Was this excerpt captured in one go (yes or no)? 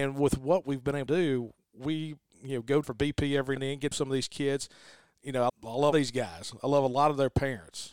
no